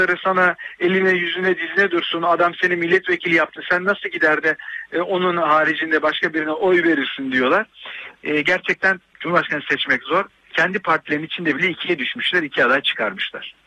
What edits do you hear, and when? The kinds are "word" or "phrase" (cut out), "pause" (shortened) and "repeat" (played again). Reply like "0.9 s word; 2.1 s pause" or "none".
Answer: none